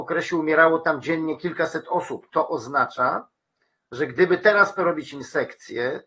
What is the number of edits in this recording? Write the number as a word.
one